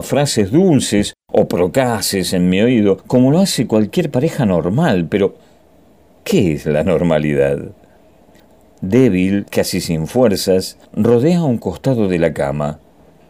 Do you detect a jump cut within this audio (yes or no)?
yes